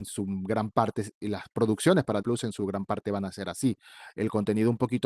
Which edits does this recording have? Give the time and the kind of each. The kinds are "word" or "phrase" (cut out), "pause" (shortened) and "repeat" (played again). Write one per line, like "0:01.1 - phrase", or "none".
0:02.2 - word